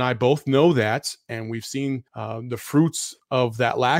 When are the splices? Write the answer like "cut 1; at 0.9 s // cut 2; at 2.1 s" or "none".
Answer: cut 1; at 2.1 s